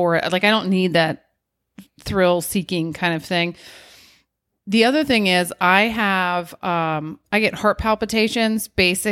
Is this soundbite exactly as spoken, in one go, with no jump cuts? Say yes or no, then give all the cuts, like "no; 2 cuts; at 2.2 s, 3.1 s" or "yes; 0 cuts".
yes; 0 cuts